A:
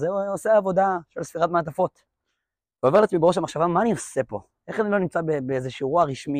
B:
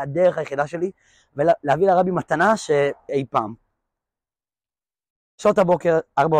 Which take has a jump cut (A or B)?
B